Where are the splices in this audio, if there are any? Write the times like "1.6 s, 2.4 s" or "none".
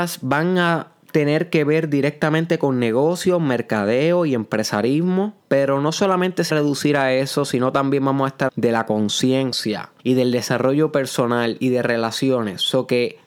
1.0 s, 5.4 s, 6.5 s, 8.5 s, 10.0 s